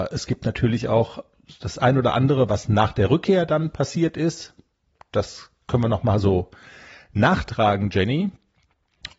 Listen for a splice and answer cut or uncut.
uncut